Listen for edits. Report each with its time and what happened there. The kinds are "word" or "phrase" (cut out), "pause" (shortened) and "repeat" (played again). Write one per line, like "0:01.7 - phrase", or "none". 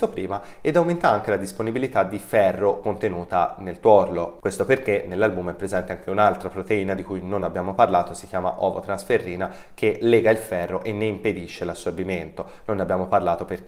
none